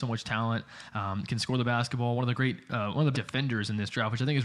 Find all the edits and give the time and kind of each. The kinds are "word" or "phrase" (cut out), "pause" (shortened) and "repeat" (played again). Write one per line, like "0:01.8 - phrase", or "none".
0:03.1 - word